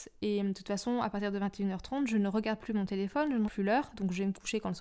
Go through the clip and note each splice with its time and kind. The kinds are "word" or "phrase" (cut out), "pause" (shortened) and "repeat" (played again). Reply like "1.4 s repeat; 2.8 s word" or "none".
3.4 s word